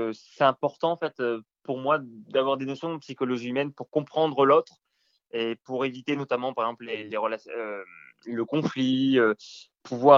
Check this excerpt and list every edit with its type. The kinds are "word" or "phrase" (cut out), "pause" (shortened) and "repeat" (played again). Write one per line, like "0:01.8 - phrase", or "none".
none